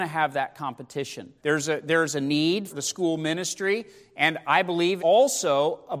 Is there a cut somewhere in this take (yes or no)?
yes